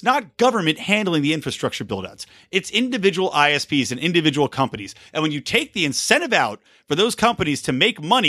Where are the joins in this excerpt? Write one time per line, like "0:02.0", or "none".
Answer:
none